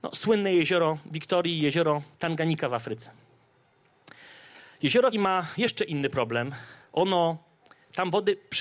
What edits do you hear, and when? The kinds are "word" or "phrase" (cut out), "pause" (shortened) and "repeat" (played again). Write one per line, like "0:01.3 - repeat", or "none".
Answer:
0:02.1 - pause
0:05.1 - word
0:06.8 - pause